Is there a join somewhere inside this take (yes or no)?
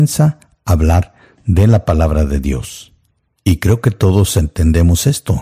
no